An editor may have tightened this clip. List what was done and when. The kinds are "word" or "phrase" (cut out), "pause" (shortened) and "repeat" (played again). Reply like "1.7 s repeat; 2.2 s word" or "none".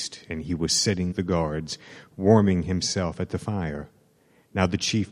1.1 s word